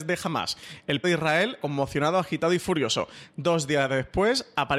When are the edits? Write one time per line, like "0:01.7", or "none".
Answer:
0:01.0
0:01.6